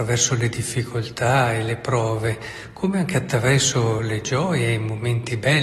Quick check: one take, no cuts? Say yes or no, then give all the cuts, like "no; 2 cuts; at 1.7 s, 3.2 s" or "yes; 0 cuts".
yes; 0 cuts